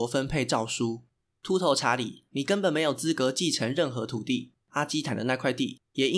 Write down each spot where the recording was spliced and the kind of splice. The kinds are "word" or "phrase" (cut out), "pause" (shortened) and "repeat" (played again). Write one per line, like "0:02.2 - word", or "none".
0:04.6 - pause